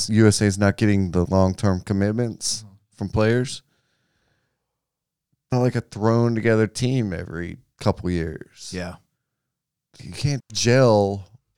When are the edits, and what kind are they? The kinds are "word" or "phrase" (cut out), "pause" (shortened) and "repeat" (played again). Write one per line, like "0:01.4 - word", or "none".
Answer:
0:01.3 - word
0:05.5 - word
0:10.0 - word
0:10.4 - word